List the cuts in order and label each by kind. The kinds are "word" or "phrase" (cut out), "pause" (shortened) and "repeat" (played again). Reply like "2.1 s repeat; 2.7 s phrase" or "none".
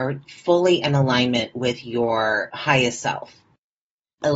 none